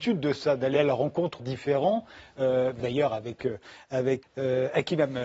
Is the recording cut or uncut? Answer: cut